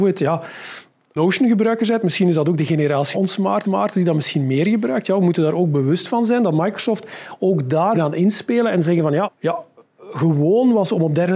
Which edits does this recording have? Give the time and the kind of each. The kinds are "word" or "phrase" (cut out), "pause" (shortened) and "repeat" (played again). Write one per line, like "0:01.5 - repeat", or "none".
0:01.2 - word
0:03.1 - word
0:03.6 - repeat
0:07.9 - word
0:09.2 - phrase